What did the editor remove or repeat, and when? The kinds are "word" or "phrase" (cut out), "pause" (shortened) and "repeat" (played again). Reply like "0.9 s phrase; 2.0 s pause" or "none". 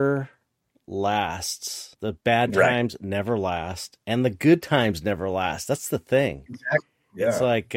1.9 s pause